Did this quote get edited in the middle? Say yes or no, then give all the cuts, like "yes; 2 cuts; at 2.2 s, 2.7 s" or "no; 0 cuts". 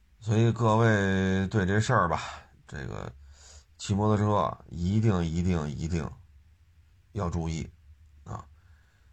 no; 0 cuts